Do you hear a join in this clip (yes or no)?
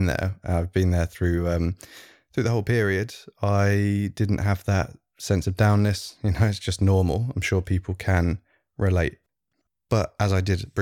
no